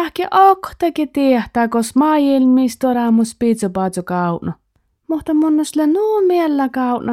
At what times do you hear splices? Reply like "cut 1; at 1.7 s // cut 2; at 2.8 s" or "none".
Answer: none